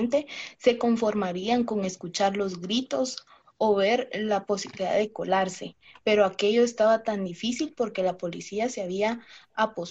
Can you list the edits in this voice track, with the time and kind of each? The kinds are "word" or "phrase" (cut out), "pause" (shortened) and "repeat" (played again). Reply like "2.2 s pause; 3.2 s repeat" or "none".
none